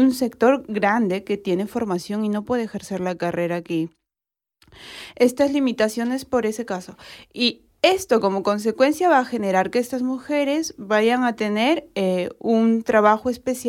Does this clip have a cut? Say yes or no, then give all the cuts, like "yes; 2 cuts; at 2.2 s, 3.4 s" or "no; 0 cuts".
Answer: no; 0 cuts